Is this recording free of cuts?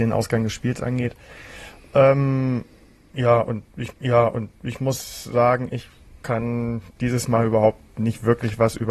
no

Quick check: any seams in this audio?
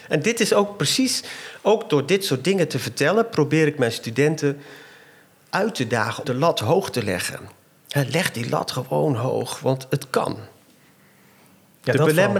yes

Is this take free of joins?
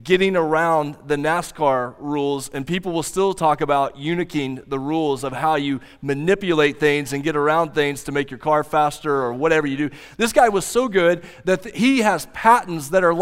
yes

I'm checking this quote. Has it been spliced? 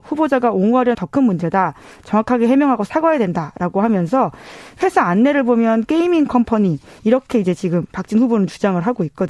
yes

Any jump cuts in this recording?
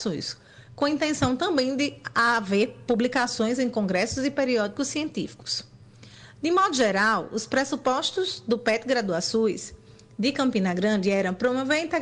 no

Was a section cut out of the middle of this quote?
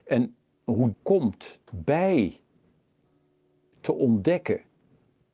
yes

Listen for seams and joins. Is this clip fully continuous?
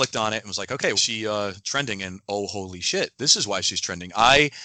no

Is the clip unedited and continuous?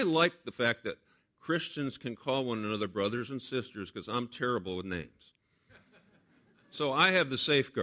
yes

